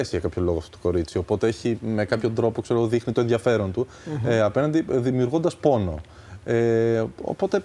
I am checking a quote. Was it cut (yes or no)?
no